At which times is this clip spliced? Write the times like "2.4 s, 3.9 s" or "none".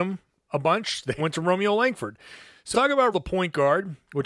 1.2 s, 2.7 s, 3.1 s